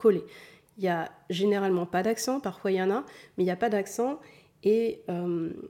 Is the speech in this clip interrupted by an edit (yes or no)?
no